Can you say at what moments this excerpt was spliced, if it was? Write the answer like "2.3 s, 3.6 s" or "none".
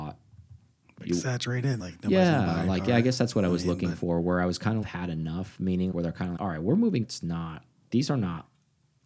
1.8 s, 4.8 s, 5.9 s, 6.4 s, 7.0 s, 7.7 s